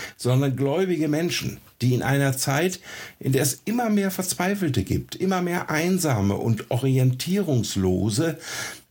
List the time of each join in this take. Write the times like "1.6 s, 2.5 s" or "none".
none